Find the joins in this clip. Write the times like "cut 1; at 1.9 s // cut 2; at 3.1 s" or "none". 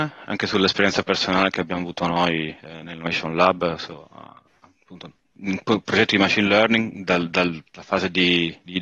none